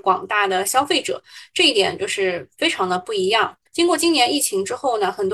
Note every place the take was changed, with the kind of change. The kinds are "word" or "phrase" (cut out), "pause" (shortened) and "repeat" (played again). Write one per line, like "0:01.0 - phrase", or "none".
0:03.7 - pause